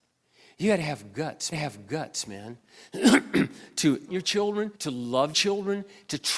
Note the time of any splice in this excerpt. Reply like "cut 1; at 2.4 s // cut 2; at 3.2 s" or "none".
cut 1; at 1.5 s // cut 2; at 4.1 s // cut 3; at 4.7 s // cut 4; at 5.3 s